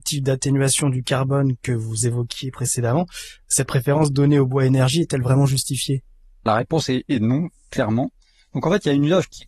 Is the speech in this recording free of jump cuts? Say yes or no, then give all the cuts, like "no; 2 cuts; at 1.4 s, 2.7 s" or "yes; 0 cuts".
no; 1 cut; at 6.5 s